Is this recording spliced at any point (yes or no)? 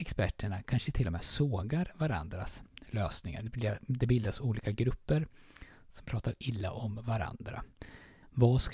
no